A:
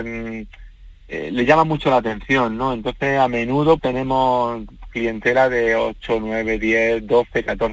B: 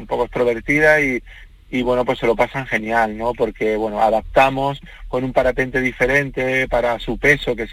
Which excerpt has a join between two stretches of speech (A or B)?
A